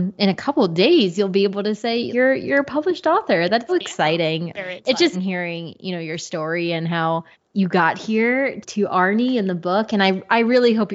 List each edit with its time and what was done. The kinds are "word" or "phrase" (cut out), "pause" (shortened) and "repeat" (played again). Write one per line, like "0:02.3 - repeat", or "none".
0:02.1 - word
0:03.7 - word
0:05.1 - word
0:07.3 - pause
0:08.6 - word